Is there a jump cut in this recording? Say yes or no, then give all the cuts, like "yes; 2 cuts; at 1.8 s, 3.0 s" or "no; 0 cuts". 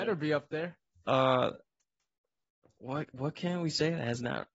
no; 0 cuts